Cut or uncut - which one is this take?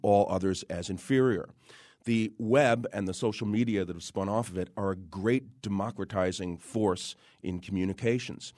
uncut